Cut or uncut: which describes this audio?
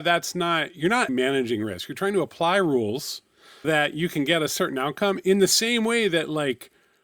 cut